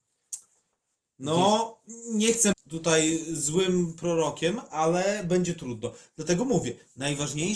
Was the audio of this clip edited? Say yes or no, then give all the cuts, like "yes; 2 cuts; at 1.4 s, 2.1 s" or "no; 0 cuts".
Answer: yes; 1 cut; at 2.5 s